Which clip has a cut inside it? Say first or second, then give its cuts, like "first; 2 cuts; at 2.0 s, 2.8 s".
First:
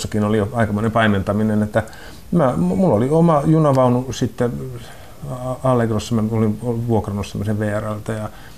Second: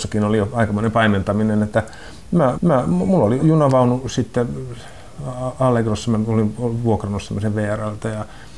second; 2 cuts; at 2.5 s, 3.4 s